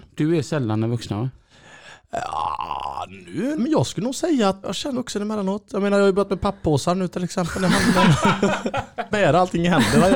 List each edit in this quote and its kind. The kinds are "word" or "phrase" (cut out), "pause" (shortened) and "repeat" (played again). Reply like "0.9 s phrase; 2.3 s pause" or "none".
3.6 s word; 4.6 s word; 4.9 s word; 9.1 s phrase